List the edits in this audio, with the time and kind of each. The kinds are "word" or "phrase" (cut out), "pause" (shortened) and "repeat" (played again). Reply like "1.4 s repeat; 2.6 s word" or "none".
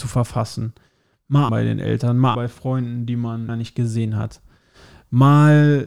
1.5 s word; 2.3 s word; 3.5 s word